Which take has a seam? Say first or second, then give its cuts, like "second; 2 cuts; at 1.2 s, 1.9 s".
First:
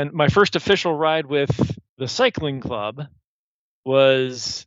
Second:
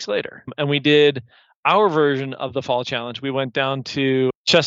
first; 1 cut; at 1.9 s